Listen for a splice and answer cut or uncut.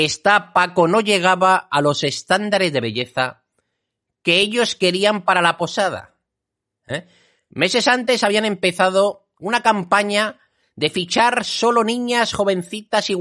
uncut